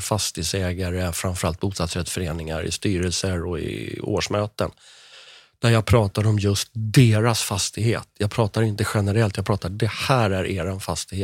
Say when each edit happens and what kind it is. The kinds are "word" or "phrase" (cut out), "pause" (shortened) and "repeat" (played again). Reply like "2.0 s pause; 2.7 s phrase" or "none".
none